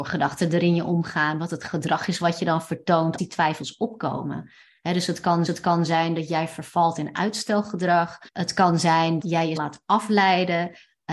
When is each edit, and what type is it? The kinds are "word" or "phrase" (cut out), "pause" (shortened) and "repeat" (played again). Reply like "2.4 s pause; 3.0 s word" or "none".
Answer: 3.2 s word; 5.5 s repeat; 8.3 s pause; 9.2 s word; 9.6 s word